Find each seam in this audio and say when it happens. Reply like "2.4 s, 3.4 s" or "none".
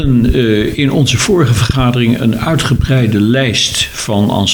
none